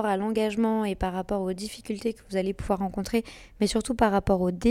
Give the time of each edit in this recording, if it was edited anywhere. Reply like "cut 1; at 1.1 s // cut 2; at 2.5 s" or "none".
none